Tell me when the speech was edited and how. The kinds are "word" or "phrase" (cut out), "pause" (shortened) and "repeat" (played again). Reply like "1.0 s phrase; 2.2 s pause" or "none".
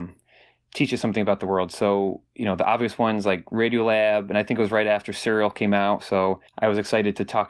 6.5 s pause